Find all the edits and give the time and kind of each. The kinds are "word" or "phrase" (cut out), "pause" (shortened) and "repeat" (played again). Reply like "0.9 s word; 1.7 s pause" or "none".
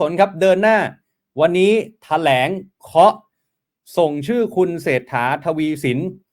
none